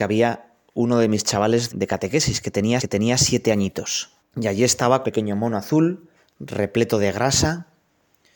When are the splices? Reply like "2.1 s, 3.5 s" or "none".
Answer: 1.7 s, 2.8 s, 4.2 s, 5.0 s, 6.2 s